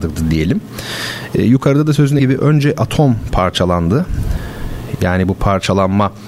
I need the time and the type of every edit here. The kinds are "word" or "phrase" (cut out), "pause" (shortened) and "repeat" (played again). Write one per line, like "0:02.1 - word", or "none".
0:02.2 - word